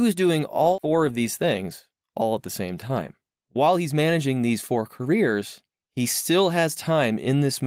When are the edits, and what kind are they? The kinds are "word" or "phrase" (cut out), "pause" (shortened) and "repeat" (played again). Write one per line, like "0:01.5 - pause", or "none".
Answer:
none